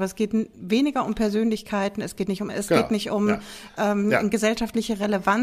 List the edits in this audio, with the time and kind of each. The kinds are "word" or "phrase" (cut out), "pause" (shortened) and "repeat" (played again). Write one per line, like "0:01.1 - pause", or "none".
0:02.5 - word